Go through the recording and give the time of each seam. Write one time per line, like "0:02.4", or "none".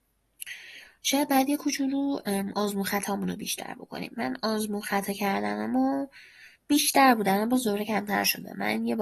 0:06.6